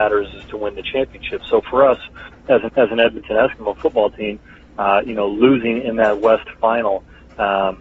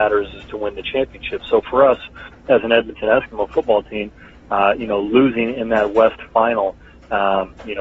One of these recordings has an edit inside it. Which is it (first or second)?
first